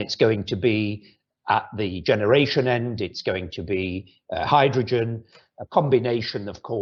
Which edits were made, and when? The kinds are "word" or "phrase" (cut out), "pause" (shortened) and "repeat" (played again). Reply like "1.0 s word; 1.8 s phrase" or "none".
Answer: none